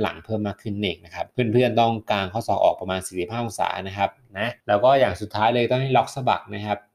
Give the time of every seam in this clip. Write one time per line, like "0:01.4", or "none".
0:01.3
0:04.6